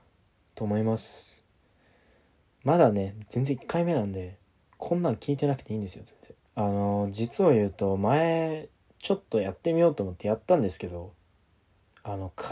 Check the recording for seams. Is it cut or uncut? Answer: cut